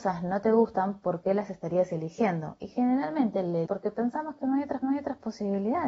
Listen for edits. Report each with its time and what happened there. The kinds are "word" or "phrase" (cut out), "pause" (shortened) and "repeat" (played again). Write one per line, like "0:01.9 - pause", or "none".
0:03.7 - word
0:04.8 - repeat